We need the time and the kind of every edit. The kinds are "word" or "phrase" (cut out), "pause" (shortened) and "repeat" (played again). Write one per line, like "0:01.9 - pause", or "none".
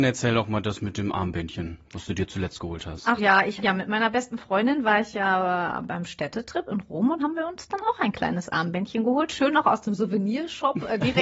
0:03.2 - word
0:03.6 - word
0:07.2 - word